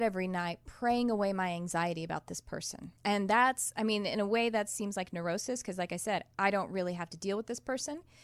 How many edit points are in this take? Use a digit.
1